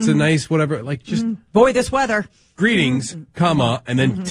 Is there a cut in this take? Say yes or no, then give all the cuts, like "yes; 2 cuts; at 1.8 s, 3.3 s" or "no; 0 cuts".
no; 0 cuts